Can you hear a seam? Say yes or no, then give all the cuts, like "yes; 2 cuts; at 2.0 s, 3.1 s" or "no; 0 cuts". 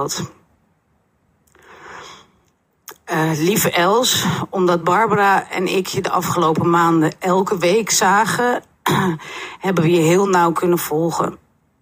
no; 0 cuts